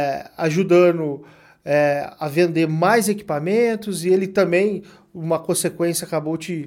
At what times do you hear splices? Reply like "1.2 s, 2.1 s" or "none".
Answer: none